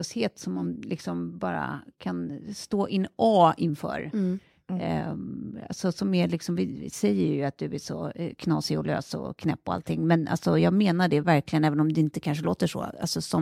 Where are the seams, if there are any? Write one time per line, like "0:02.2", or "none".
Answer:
none